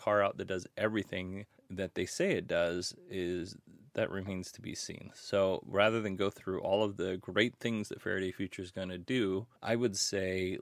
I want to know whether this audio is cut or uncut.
cut